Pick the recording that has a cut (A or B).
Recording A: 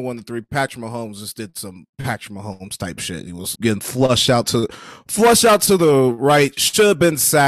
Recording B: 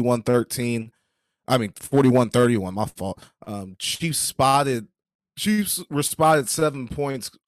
A